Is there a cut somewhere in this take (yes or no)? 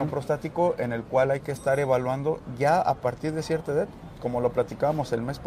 no